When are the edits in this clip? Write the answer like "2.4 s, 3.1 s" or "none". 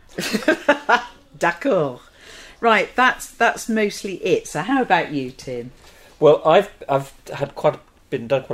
none